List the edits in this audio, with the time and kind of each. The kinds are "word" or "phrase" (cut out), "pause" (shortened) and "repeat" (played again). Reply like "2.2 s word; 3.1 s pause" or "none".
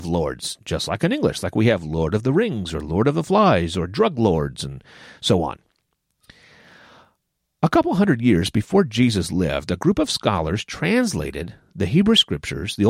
none